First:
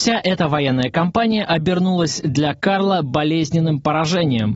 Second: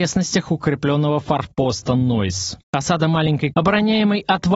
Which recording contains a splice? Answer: second; 2 cuts; at 2.6 s, 3.5 s

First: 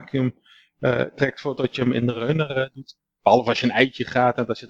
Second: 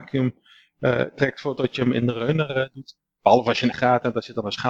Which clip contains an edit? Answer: second; 1 cut; at 3.7 s

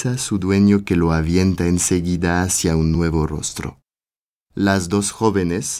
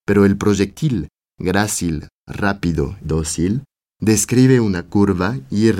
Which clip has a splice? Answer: second; 1 cut; at 3.0 s

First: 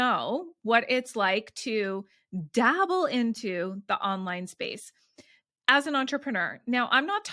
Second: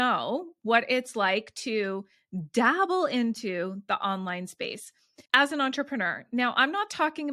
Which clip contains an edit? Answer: second; 1 cut; at 5.3 s

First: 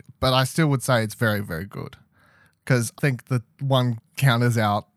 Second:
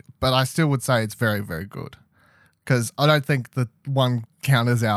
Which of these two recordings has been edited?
first; 1 cut; at 3.0 s

